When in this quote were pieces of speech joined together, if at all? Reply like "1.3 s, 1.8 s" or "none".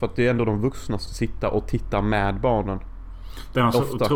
1.1 s